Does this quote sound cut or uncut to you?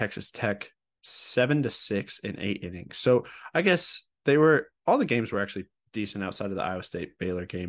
uncut